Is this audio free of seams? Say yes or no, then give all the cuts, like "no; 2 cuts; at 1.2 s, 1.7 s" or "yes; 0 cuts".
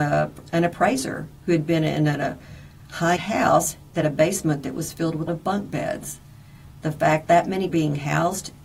no; 5 cuts; at 3.2 s, 4.0 s, 5.3 s, 7.3 s, 7.7 s